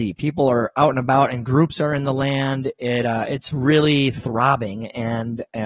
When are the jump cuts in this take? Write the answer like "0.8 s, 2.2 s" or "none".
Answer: none

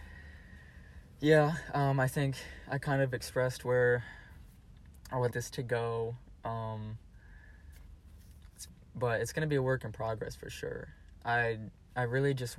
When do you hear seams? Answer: 5.3 s

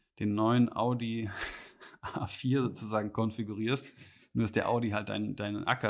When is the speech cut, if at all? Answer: none

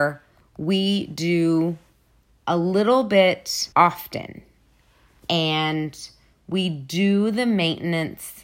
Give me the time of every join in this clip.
3.7 s

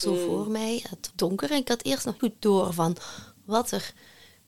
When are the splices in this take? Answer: 1.1 s, 2.2 s

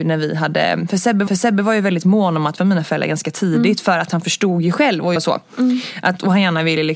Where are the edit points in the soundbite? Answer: 1.3 s, 2.6 s, 5.2 s

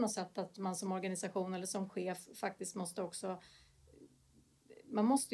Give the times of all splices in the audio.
none

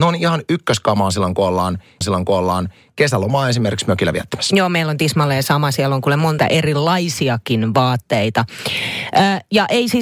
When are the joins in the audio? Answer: 2.0 s, 6.4 s

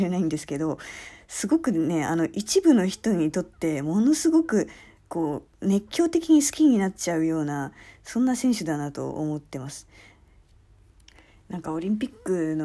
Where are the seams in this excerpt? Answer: none

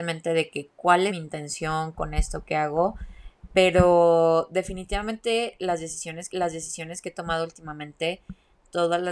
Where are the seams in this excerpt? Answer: 1.1 s, 6.3 s

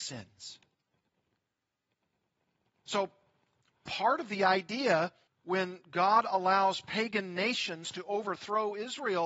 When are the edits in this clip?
5.3 s

